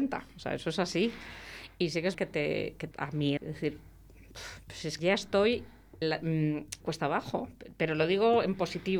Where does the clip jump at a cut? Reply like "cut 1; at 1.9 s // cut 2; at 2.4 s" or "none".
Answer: cut 1; at 2.1 s // cut 2; at 2.9 s // cut 3; at 3.4 s // cut 4; at 5.0 s // cut 5; at 6.0 s // cut 6; at 6.8 s